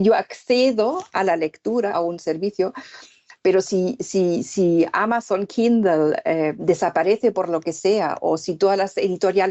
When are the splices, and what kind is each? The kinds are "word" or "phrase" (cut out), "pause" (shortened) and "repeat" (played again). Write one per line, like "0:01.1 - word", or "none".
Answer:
0:01.9 - phrase